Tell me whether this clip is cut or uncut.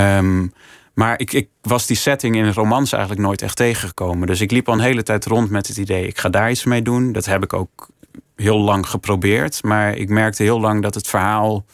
uncut